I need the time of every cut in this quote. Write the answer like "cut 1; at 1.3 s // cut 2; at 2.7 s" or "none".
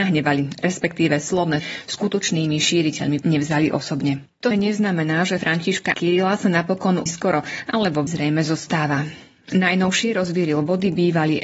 cut 1; at 1.6 s // cut 2; at 3.2 s // cut 3; at 4.5 s // cut 4; at 5.4 s // cut 5; at 5.9 s // cut 6; at 7.1 s // cut 7; at 8.1 s